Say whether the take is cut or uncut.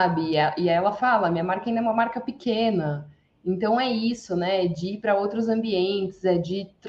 uncut